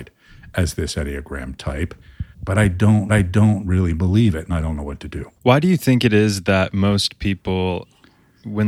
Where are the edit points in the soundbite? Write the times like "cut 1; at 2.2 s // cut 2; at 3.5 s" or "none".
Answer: cut 1; at 2.3 s // cut 2; at 3.1 s // cut 3; at 5.4 s